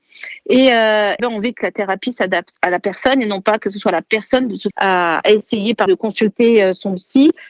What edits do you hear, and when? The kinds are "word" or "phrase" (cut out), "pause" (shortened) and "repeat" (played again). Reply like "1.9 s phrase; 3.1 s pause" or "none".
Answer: 1.2 s word; 2.6 s word; 4.7 s word; 5.9 s word